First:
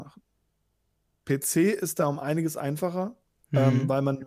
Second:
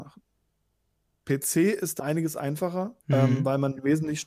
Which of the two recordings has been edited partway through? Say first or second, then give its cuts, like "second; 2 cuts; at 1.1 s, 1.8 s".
second; 2 cuts; at 2.0 s, 3.0 s